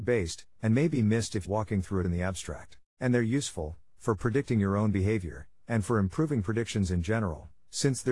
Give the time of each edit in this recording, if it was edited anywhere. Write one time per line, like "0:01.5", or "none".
0:01.4
0:02.0
0:02.9